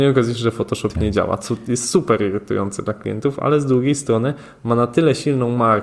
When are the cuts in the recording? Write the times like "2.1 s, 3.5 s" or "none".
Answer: none